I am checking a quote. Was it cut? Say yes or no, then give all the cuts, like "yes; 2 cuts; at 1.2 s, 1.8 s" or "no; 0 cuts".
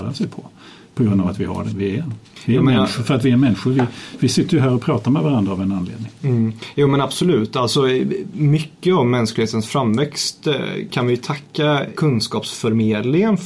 no; 0 cuts